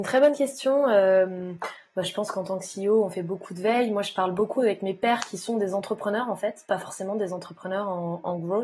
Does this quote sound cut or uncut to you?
uncut